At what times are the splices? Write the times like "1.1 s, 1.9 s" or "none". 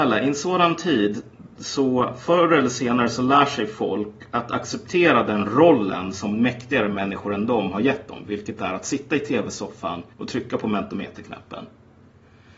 10.1 s